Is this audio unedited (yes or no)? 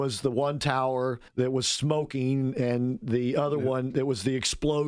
no